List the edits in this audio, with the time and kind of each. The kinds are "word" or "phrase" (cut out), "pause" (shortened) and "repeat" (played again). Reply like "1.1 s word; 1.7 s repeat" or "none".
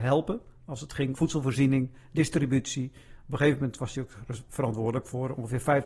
1.1 s word